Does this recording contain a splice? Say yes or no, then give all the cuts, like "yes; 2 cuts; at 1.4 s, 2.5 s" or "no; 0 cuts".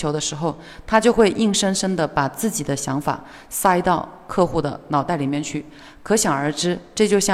no; 0 cuts